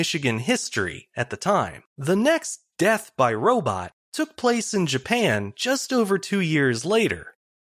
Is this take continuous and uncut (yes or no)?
no